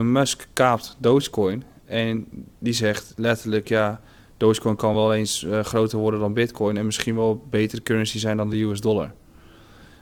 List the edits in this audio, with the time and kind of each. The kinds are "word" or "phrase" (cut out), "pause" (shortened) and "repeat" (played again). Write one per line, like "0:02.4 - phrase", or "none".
none